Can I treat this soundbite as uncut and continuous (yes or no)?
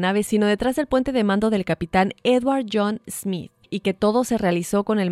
no